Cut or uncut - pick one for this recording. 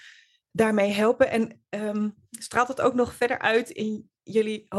uncut